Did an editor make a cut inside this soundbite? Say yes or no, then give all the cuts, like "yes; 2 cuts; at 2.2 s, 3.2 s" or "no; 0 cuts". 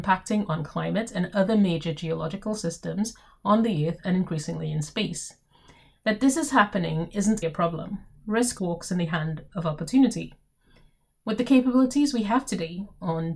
yes; 2 cuts; at 7.4 s, 8.6 s